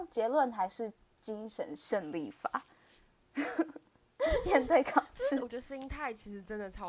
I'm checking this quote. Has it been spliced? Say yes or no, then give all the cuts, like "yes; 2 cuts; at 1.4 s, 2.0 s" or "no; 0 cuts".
no; 0 cuts